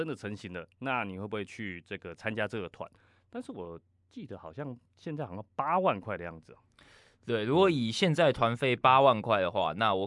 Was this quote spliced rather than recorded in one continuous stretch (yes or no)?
no